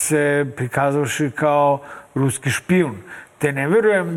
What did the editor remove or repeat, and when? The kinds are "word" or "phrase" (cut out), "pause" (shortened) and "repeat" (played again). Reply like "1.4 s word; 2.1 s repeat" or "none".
none